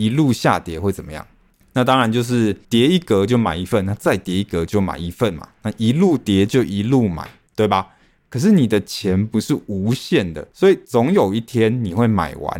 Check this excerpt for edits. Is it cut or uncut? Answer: cut